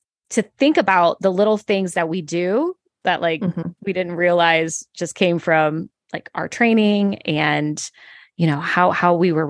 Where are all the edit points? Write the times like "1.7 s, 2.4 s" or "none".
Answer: none